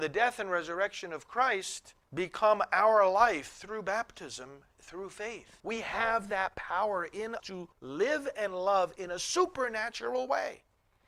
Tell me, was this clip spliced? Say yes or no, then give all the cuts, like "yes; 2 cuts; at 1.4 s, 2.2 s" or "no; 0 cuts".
yes; 4 cuts; at 2.0 s, 5.6 s, 7.4 s, 7.7 s